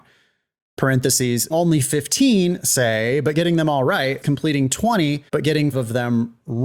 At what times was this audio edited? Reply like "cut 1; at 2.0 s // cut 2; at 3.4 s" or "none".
cut 1; at 1.5 s // cut 2; at 4.2 s // cut 3; at 5.3 s // cut 4; at 5.7 s